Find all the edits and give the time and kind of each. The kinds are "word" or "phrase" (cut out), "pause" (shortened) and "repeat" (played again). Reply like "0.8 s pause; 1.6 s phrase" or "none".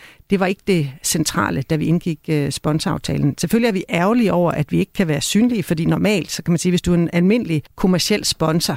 7.7 s pause